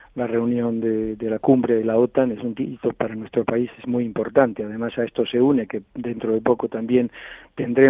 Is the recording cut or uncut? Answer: uncut